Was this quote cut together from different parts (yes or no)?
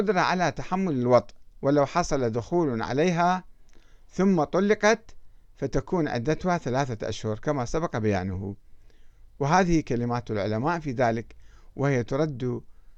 no